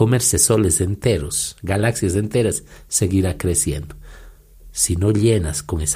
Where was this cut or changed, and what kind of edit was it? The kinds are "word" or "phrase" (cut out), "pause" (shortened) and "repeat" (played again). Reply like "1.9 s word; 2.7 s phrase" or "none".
none